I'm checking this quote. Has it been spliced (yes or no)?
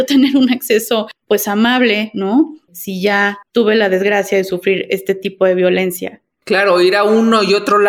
yes